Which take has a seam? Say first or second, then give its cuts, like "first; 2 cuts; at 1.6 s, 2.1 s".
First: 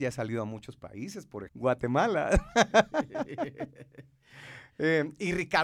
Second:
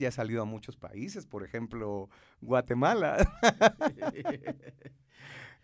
first; 1 cut; at 1.5 s